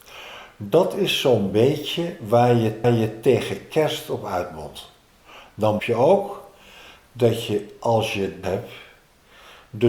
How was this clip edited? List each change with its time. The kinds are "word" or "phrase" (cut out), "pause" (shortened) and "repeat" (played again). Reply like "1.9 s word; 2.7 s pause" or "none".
2.8 s repeat; 5.8 s word; 8.4 s word